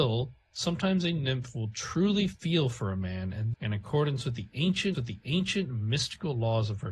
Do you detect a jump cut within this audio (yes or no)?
yes